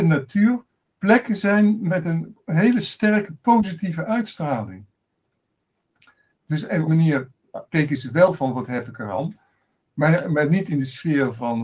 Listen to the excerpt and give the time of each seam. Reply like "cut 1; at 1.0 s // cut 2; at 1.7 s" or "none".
cut 1; at 6.9 s // cut 2; at 7.6 s

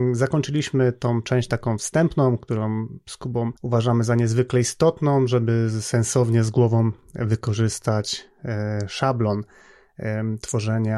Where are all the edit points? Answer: cut 1; at 3.6 s

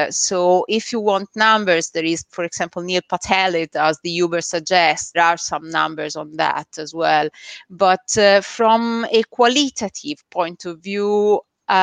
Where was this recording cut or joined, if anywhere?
cut 1; at 5.1 s

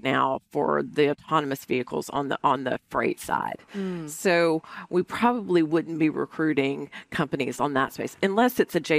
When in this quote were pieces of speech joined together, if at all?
none

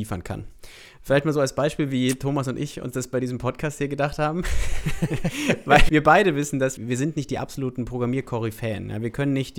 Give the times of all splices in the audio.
cut 1; at 5.9 s // cut 2; at 6.8 s

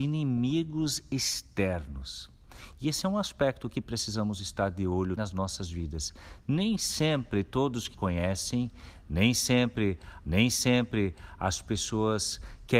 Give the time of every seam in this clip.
cut 1; at 5.2 s // cut 2; at 7.9 s // cut 3; at 10.2 s

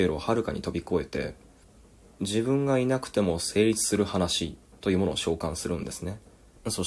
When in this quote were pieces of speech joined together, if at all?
none

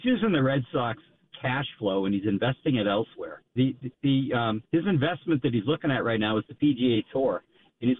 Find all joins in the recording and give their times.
cut 1; at 3.5 s

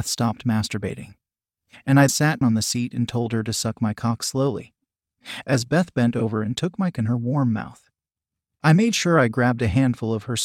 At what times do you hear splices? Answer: cut 1; at 2.1 s // cut 2; at 2.4 s // cut 3; at 6.9 s

